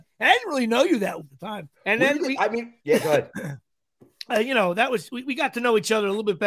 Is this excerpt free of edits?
no; 4 cuts; at 1.2 s, 1.7 s, 2.8 s, 4.3 s

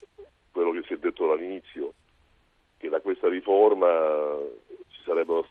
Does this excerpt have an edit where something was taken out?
no; 0 cuts

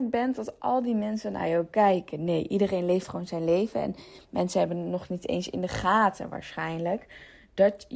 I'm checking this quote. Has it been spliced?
no; 0 cuts

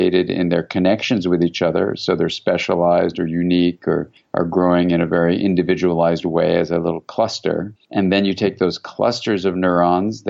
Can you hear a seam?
yes; 1 cut; at 7.8 s

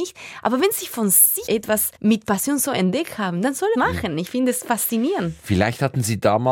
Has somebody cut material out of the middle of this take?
yes; 3 cuts; at 1.5 s, 2.0 s, 3.7 s

